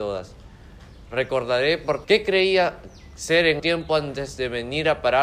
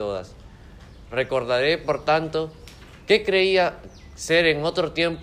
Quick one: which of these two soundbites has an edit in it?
first; 2 cuts; at 2.0 s, 3.6 s

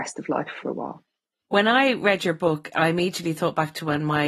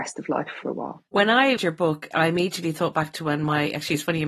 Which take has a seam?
second; 2 cuts; at 1.1 s, 1.6 s

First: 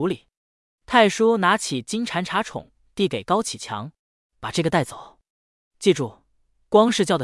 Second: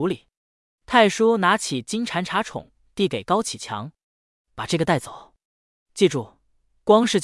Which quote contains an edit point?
first; 1 cut; at 4.0 s

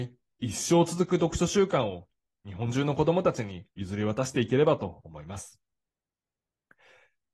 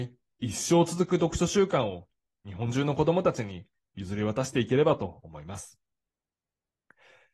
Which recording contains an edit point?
first; 1 cut; at 3.7 s

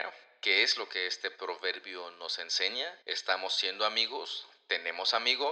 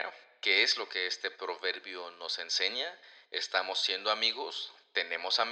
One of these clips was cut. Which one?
first; 1 cut; at 3.0 s

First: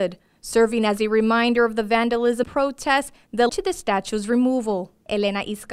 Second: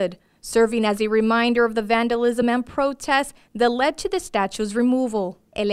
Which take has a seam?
first; 2 cuts; at 2.4 s, 3.5 s

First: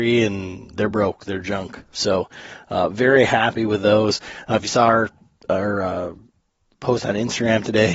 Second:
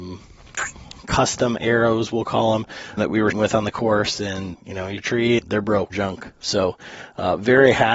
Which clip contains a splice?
second; 6 cuts; at 3.0 s, 3.3 s, 4.5 s, 5.0 s, 5.4 s, 5.9 s

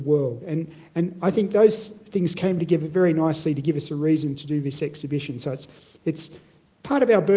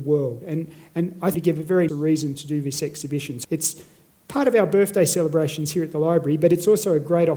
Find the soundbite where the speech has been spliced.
second; 3 cuts; at 1.3 s, 1.9 s, 3.4 s

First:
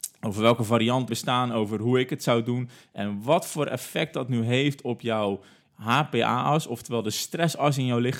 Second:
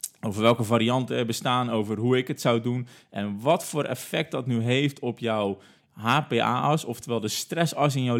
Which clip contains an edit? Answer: first; 1 cut; at 1.1 s

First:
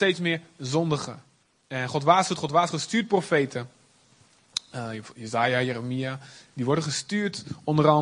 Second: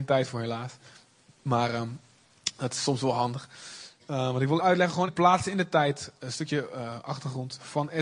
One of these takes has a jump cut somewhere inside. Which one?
second; 2 cuts; at 4.6 s, 5.1 s

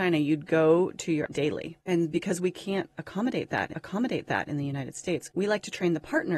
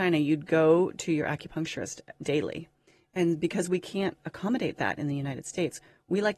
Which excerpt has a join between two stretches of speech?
first; 4 cuts; at 1.3 s, 1.8 s, 3.7 s, 5.3 s

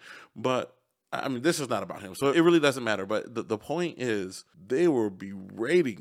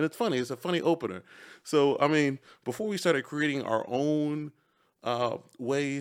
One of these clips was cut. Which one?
first; 1 cut; at 2.3 s

